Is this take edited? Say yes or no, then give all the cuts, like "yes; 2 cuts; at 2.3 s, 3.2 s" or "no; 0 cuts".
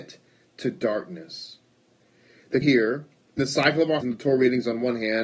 yes; 3 cuts; at 2.6 s, 3.4 s, 4.0 s